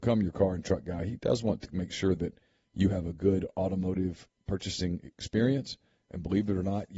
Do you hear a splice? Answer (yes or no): no